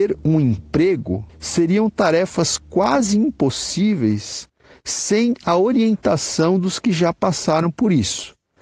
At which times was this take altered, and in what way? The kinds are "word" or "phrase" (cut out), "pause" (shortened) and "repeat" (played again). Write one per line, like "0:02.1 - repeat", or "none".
0:01.3 - pause